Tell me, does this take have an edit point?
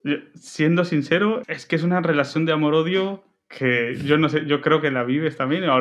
yes; 1 cut; at 1.4 s

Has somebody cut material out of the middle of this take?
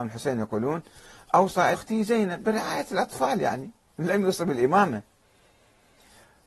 yes; 1 cut; at 1.7 s

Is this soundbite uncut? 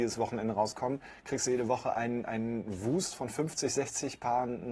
yes; 0 cuts

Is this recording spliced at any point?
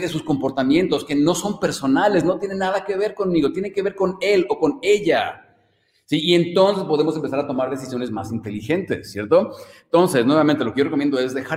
no; 0 cuts

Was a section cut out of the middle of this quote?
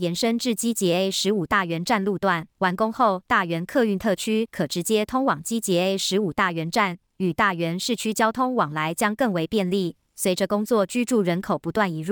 yes; 1 cut; at 2.5 s

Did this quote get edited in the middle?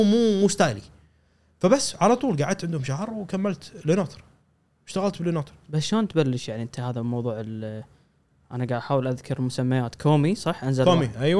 no; 0 cuts

